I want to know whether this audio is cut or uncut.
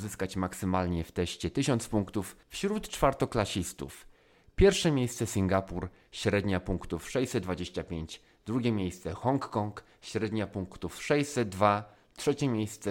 cut